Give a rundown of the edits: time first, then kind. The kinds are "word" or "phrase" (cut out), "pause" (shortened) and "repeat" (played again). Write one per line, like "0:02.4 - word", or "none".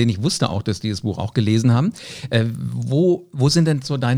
none